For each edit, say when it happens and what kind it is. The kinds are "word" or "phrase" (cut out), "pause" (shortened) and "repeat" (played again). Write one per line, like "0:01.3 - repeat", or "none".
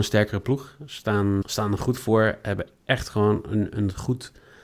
0:01.4 - word